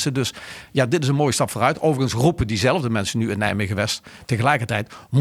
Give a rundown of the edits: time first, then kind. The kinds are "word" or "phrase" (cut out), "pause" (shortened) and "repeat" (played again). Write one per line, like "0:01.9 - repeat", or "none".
none